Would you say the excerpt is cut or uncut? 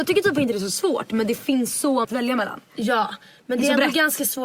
cut